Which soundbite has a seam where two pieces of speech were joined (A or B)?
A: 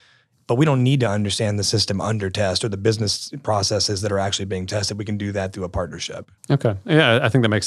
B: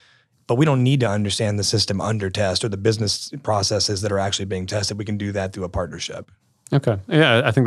A